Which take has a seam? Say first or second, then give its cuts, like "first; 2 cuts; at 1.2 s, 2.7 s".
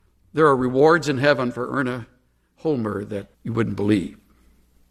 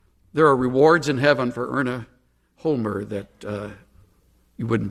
first; 1 cut; at 3.3 s